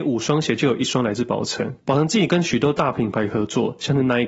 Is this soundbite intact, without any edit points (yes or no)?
no